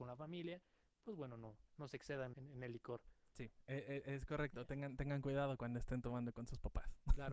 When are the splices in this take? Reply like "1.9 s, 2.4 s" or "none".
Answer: 1.7 s, 2.3 s